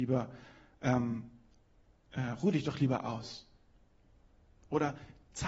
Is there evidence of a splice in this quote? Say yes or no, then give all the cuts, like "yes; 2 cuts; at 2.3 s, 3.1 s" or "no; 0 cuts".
no; 0 cuts